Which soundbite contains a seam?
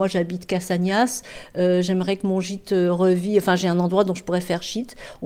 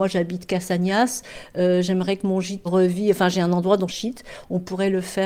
second; 2 cuts; at 2.6 s, 3.9 s

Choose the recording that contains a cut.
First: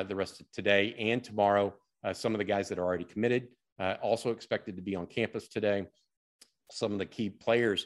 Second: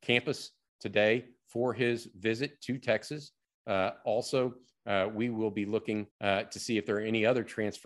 second; 1 cut; at 6.1 s

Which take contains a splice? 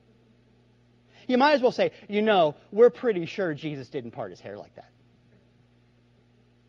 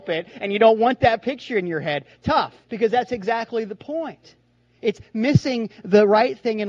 second; 1 cut; at 2.6 s

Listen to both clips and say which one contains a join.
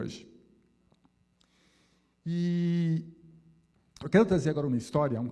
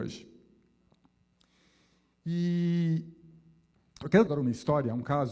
second; 1 cut; at 4.3 s

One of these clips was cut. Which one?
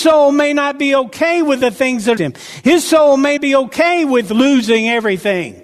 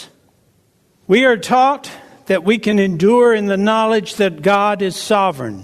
first; 2 cuts; at 2.2 s, 3.4 s

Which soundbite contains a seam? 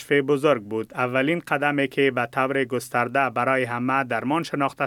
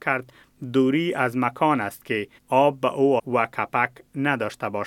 second; 2 cuts; at 2.4 s, 3.2 s

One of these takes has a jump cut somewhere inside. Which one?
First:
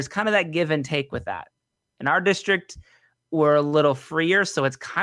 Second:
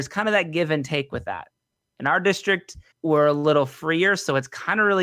second; 1 cut; at 2.9 s

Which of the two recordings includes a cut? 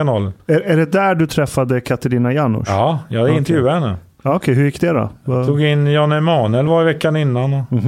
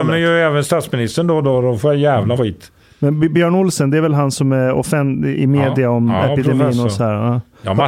second; 1 cut; at 2.4 s

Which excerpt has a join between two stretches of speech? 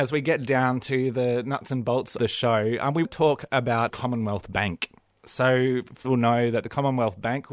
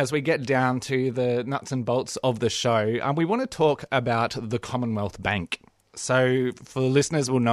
first; 4 cuts; at 2.2 s, 3.0 s, 3.9 s, 6.0 s

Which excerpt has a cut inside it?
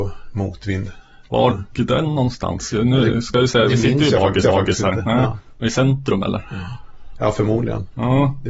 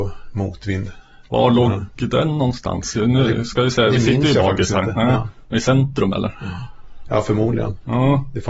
first; 2 cuts; at 1.5 s, 4.4 s

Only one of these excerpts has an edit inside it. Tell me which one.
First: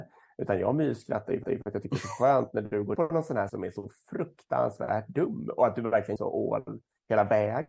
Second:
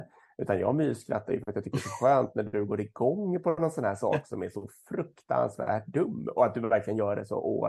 first; 4 cuts; at 1.4 s, 3.0 s, 3.5 s, 6.2 s

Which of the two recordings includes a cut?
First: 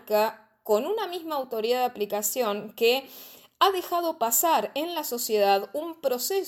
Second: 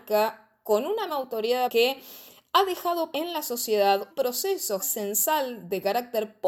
second; 5 cuts; at 1.1 s, 1.7 s, 3.1 s, 4.1 s, 4.8 s

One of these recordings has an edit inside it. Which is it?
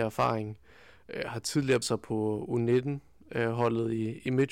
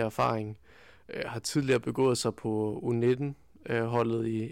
first; 1 cut; at 1.8 s

